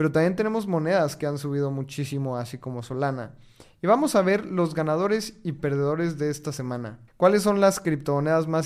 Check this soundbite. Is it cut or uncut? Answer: cut